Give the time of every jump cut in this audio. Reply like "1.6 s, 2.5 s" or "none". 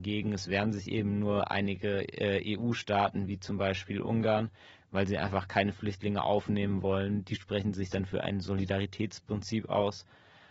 none